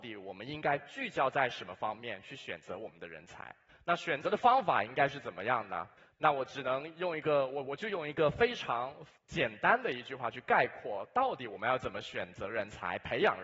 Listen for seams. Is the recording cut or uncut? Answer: cut